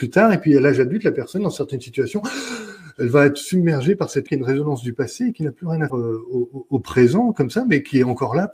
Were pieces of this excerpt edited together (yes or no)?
yes